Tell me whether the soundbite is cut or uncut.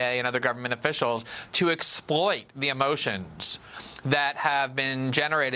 uncut